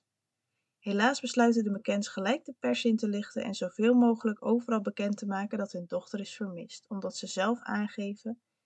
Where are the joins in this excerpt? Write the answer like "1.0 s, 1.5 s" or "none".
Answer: none